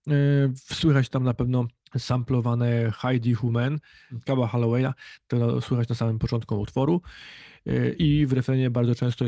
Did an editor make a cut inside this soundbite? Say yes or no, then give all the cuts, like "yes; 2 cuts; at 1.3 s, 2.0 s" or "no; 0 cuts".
no; 0 cuts